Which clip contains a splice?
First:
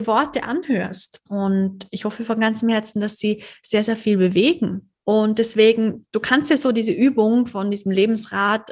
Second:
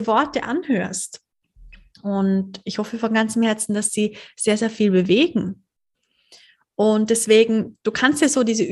first; 2 cuts; at 1.3 s, 5.0 s

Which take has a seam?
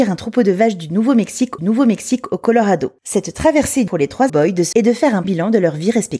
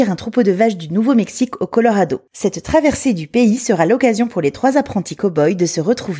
first; 5 cuts; at 1.6 s, 3.9 s, 4.3 s, 4.7 s, 5.2 s

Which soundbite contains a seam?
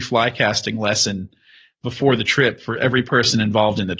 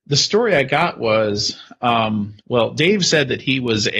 second; 1 cut; at 2.4 s

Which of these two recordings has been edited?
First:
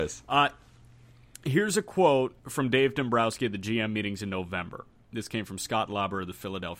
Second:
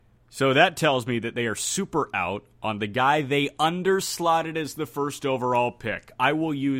first; 1 cut; at 2.4 s

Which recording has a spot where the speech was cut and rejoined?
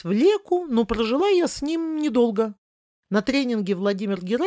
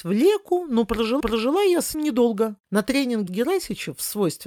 second; 4 cuts; at 1.2 s, 1.9 s, 2.6 s, 3.3 s

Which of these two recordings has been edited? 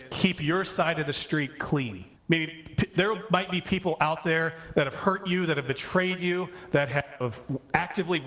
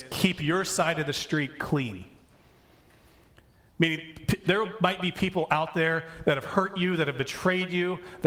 first; 1 cut; at 2.2 s

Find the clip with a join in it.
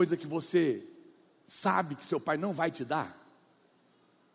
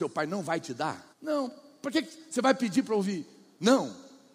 second; 1 cut; at 1.1 s

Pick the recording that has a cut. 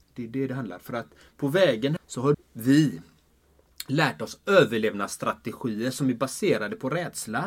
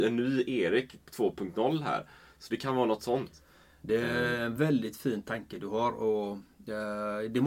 first; 2 cuts; at 2.0 s, 2.3 s

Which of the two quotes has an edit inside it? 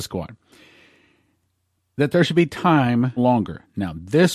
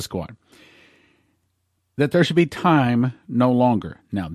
first; 1 cut; at 3.2 s

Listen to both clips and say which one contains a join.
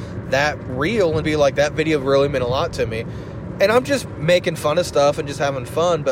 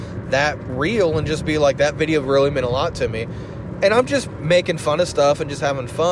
first; 1 cut; at 1.2 s

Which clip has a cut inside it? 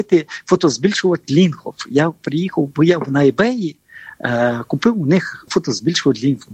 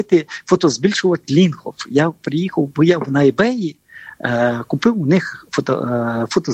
first; 1 cut; at 5.5 s

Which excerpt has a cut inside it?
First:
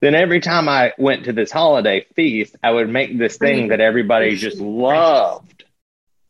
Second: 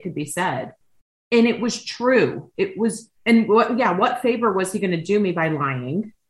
second; 1 cut; at 3.2 s

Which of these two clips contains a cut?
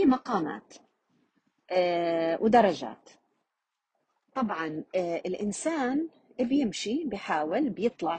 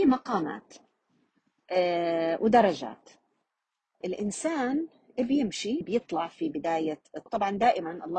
second; 3 cuts; at 4.0 s, 5.8 s, 7.3 s

